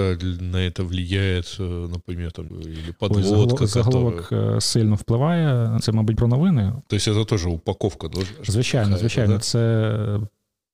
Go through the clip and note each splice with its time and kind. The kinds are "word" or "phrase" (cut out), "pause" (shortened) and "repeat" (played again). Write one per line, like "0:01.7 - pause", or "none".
0:02.5 - word
0:05.8 - word
0:06.1 - word